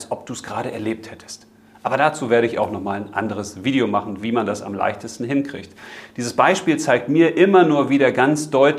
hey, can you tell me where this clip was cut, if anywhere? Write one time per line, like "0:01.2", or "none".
none